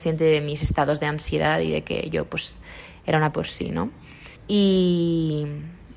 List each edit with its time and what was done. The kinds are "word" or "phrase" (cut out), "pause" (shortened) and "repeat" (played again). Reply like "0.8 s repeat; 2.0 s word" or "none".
3.3 s phrase; 4.4 s pause